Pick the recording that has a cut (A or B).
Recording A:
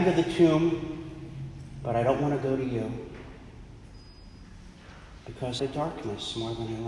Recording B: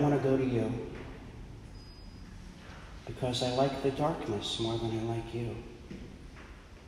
A